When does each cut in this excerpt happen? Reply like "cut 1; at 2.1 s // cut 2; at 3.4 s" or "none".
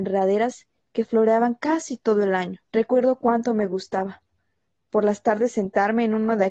cut 1; at 2.6 s